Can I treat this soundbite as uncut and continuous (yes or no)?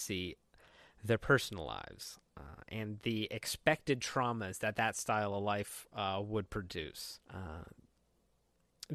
no